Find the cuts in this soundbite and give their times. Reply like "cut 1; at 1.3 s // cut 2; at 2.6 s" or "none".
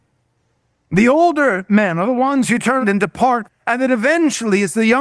cut 1; at 2.8 s // cut 2; at 3.4 s